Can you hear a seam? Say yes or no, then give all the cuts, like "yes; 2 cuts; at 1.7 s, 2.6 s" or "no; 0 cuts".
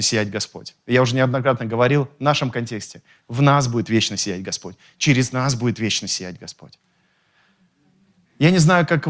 no; 0 cuts